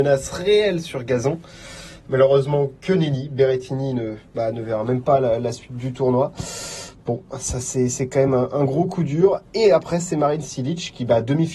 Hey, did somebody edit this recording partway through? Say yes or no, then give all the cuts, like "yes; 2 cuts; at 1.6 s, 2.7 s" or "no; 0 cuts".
no; 0 cuts